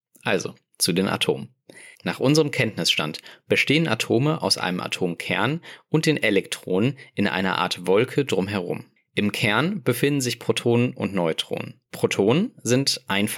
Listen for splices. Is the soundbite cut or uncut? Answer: cut